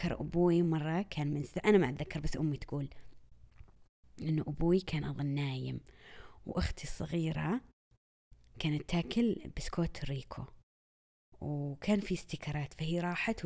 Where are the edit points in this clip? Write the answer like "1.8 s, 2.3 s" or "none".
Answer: none